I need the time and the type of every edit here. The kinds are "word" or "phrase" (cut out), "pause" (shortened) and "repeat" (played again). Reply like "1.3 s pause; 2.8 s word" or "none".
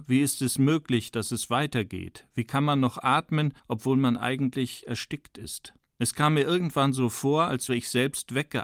3.6 s pause; 5.8 s pause; 7.7 s word

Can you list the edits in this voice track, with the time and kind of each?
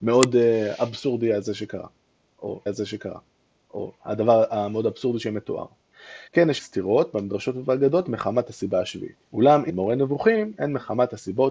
2.7 s repeat; 6.3 s pause; 6.6 s word; 9.2 s pause; 9.7 s phrase

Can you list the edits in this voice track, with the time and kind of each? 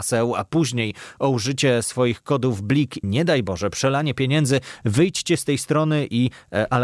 3.0 s word

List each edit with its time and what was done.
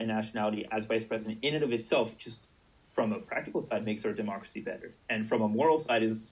2.6 s pause; 5.0 s pause

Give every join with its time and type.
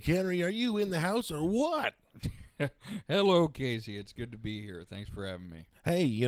none

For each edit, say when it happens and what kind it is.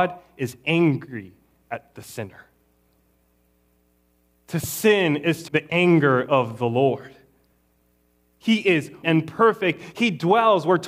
5.5 s word; 9.0 s word

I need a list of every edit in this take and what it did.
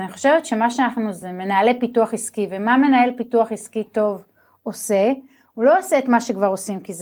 none

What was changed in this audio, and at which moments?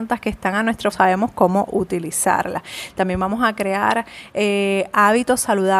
0.9 s phrase

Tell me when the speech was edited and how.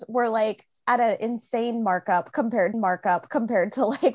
2.7 s repeat

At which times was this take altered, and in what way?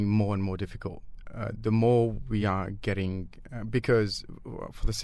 none

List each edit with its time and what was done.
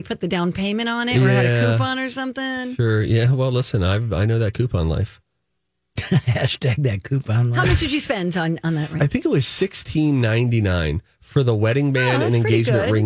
5.3 s pause

